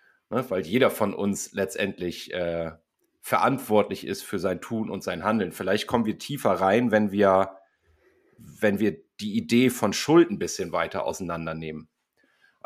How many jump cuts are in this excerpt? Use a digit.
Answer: 0